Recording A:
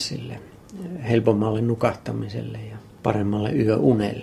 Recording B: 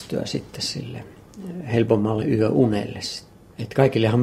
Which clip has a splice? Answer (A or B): B